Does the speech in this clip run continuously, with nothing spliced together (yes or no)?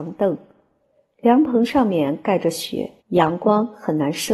no